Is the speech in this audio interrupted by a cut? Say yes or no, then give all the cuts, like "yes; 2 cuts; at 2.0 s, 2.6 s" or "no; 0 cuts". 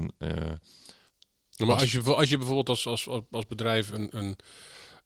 yes; 1 cut; at 1.1 s